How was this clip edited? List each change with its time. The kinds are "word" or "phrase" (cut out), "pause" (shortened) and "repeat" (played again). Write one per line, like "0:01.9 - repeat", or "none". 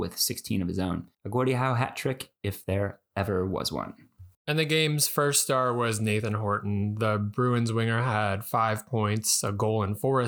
0:01.1 - pause
0:04.3 - pause